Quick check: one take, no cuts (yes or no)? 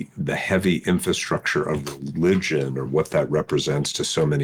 yes